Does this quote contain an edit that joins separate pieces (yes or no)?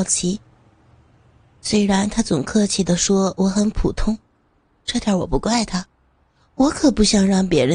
no